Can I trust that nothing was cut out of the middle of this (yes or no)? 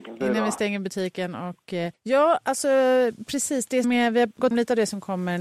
no